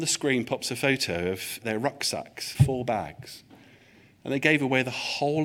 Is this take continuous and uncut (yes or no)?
no